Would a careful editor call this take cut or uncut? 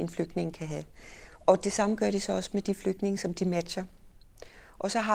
uncut